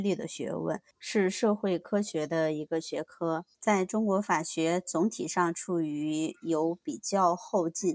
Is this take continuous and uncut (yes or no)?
no